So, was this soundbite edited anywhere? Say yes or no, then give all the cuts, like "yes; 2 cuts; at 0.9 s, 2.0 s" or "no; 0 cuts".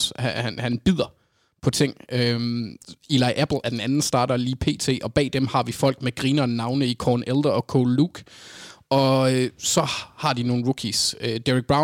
no; 0 cuts